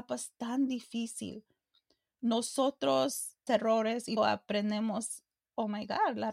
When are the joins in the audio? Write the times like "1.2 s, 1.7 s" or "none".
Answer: 3.5 s, 4.2 s